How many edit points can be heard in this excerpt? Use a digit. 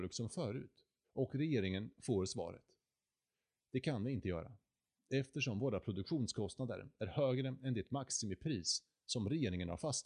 1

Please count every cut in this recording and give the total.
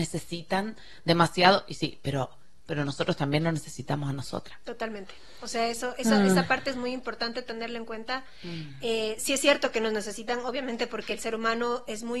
0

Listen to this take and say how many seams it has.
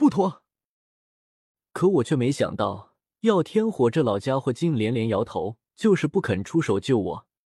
1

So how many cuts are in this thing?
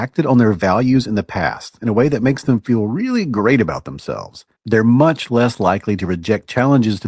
1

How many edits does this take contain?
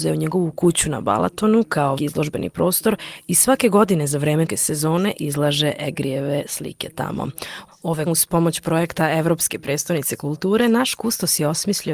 3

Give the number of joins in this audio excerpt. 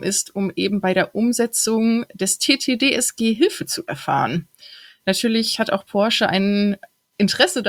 0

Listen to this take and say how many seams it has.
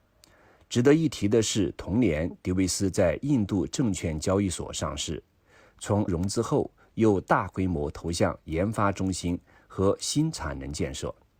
1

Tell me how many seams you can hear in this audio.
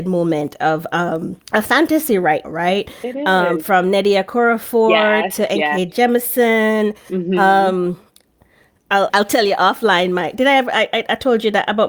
3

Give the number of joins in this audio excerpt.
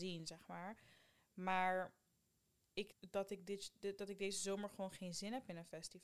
1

